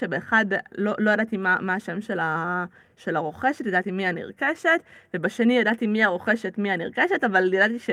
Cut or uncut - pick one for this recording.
uncut